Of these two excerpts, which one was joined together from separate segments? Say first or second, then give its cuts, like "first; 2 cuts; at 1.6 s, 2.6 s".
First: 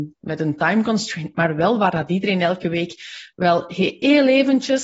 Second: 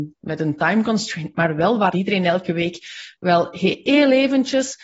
second; 1 cut; at 1.9 s